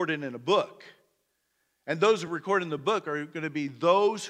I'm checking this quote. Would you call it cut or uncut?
uncut